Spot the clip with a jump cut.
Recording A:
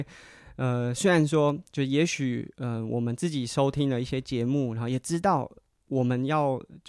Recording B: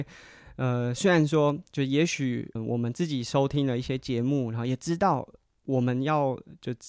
B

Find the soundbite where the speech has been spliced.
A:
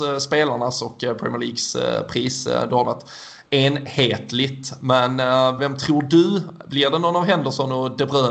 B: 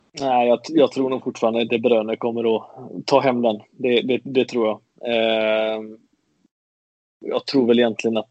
A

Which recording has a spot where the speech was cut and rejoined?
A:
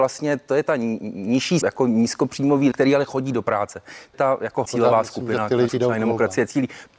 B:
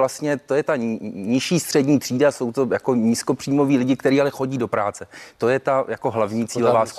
A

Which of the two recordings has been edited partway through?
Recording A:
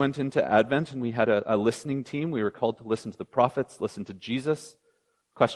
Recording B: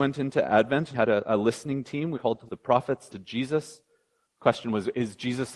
B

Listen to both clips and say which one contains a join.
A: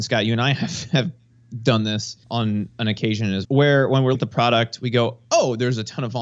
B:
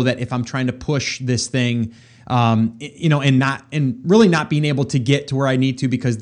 A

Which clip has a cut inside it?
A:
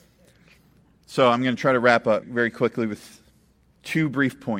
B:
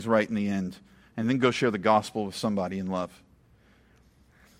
A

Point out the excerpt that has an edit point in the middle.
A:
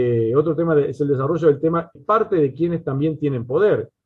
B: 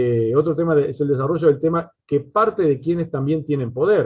A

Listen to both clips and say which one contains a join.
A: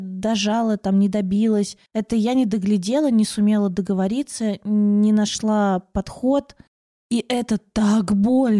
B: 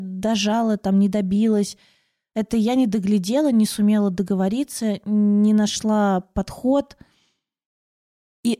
A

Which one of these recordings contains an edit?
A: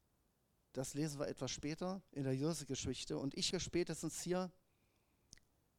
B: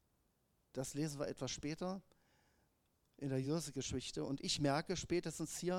A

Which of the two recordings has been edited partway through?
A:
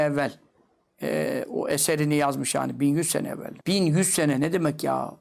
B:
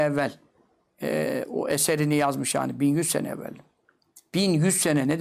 A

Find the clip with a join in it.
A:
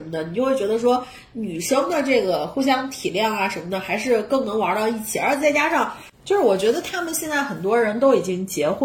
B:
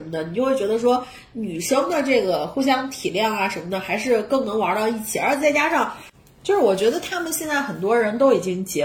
A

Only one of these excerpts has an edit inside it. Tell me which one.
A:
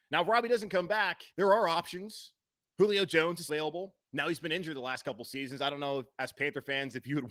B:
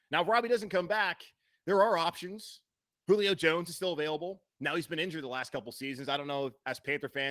A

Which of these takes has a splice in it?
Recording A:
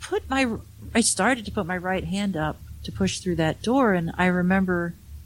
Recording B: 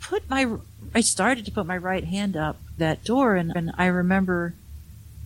B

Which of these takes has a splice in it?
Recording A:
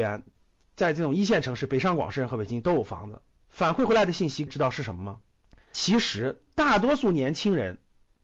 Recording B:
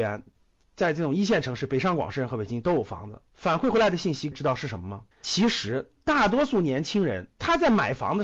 B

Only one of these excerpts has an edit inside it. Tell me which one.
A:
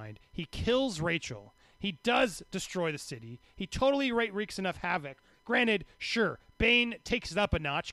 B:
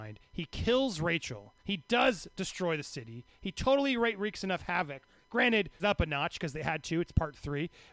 B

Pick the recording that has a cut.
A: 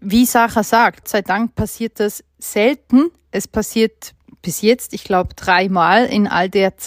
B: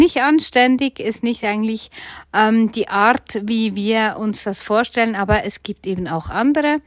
A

